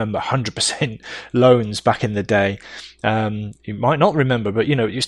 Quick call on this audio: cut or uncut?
uncut